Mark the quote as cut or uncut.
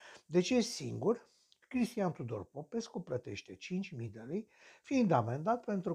uncut